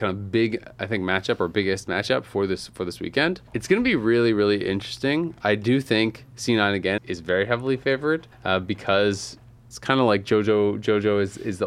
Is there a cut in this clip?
yes; 5 cuts; at 3.5 s, 6.3 s, 7.0 s, 8.3 s, 9.6 s

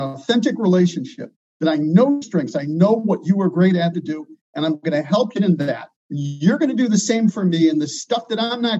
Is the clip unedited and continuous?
no; 4 cuts; at 2.2 s, 3.9 s, 5.4 s, 6.0 s

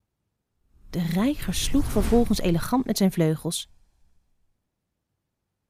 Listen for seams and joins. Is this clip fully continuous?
yes; 0 cuts

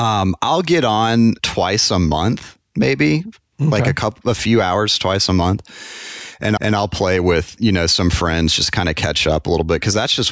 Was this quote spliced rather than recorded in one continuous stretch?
yes; 2 cuts; at 1.4 s, 6.6 s

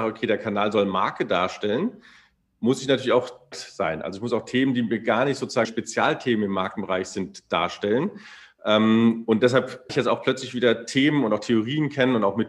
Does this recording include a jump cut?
yes; 3 cuts; at 3.5 s, 5.6 s, 9.9 s

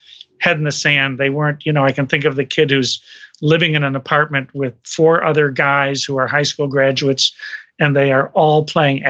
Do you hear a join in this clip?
yes; 2 cuts; at 3.3 s, 4.8 s

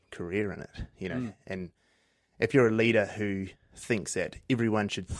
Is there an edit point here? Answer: no; 0 cuts

